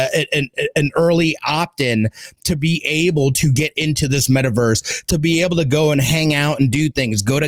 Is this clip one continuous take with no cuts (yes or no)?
yes